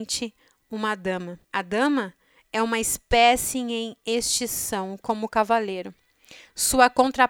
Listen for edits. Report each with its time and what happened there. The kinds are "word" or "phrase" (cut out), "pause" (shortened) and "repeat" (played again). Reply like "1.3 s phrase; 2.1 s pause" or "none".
1.4 s pause